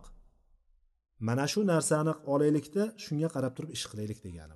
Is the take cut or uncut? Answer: uncut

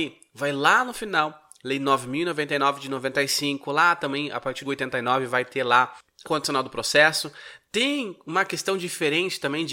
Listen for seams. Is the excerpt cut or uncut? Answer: cut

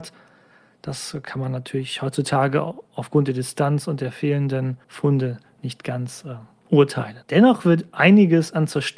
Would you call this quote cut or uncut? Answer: cut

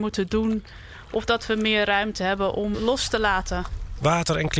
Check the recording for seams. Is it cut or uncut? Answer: cut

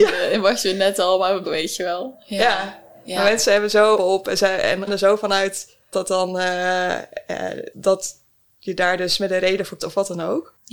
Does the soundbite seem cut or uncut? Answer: cut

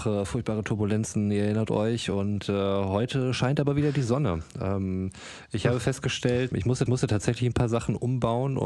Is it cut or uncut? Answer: cut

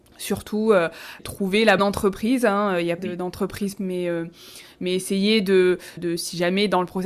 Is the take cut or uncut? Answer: cut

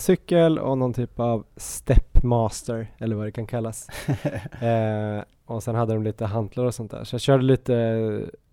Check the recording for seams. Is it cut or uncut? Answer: uncut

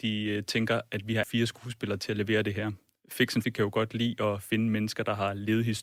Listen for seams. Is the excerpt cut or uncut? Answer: cut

